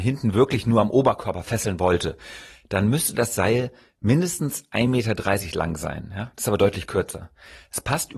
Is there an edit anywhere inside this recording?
no; 0 cuts

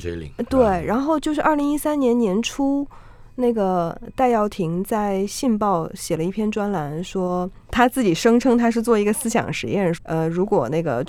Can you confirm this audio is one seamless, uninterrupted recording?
no; 2 cuts; at 7.6 s, 9.9 s

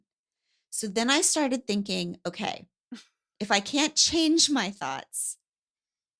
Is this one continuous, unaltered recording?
yes; 0 cuts

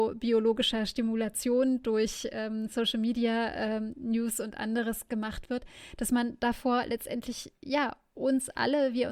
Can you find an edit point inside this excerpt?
no; 0 cuts

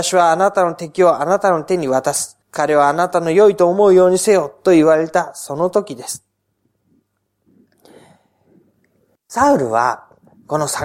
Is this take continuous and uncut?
no; 1 cut; at 2.4 s

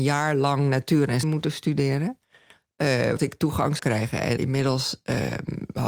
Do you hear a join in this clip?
yes; 4 cuts; at 1.2 s, 3.2 s, 3.8 s, 4.4 s

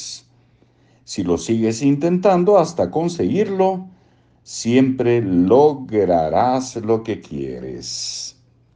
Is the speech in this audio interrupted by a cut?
no; 0 cuts

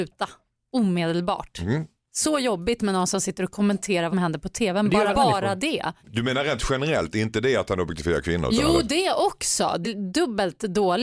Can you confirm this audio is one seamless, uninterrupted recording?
no; 4 cuts; at 4.1 s, 5.1 s, 6.0 s, 9.8 s

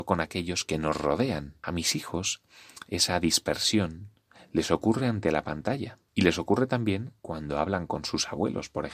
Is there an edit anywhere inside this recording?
no; 0 cuts

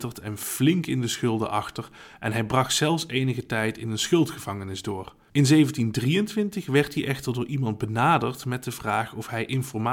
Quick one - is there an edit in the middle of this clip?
no; 0 cuts

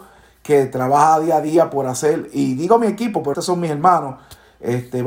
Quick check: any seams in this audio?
yes; 1 cut; at 3.3 s

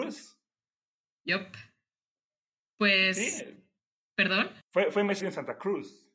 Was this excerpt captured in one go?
no; 2 cuts; at 4.6 s, 5.2 s

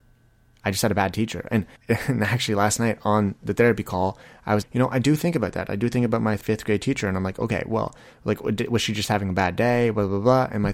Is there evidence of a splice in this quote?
yes; 2 cuts; at 1.8 s, 4.6 s

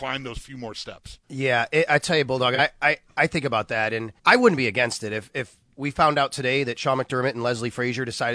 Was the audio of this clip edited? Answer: yes; 2 cuts; at 1.2 s, 4.2 s

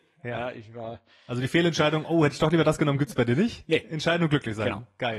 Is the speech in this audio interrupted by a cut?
no; 0 cuts

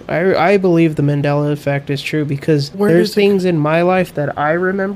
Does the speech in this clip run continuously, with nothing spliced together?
no; 2 cuts; at 0.9 s, 2.7 s

